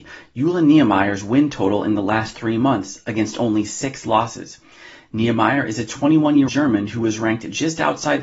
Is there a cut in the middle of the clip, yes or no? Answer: yes